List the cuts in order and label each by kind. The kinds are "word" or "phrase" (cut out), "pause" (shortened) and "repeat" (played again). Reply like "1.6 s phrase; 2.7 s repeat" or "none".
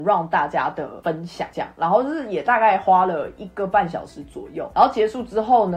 none